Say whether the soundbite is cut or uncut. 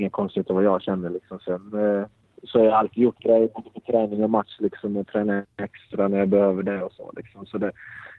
cut